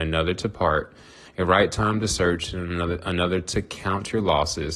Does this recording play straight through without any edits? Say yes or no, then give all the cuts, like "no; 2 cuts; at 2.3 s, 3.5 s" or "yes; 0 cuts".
yes; 0 cuts